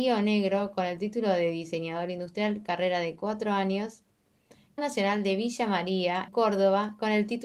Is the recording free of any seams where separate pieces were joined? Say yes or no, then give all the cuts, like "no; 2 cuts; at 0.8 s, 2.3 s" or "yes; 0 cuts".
no; 2 cuts; at 4.8 s, 6.3 s